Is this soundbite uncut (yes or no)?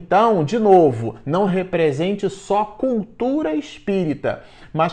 yes